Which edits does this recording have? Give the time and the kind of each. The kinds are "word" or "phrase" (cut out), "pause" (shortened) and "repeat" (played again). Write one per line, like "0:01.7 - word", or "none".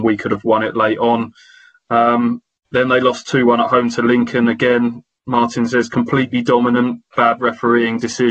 none